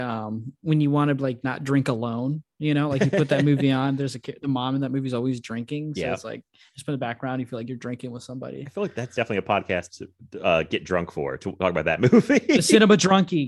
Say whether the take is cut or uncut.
uncut